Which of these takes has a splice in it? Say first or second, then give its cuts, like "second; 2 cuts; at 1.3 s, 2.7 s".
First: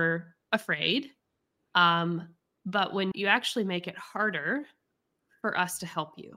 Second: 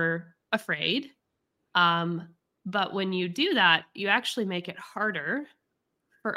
first; 1 cut; at 3.1 s